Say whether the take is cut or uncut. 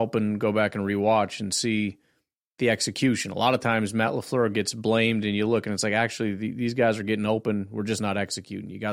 uncut